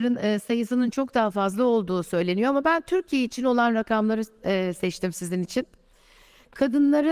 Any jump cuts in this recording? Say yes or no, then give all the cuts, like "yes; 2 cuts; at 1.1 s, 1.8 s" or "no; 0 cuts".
no; 0 cuts